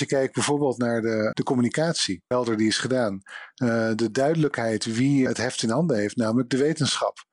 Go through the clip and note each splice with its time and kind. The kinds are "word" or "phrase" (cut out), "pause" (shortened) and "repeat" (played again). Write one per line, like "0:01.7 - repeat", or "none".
0:01.3 - word
0:02.3 - word
0:05.3 - word